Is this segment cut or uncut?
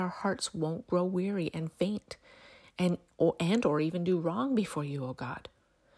uncut